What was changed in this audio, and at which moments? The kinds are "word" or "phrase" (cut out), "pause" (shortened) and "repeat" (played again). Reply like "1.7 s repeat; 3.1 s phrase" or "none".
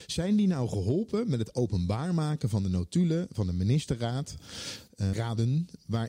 5.1 s word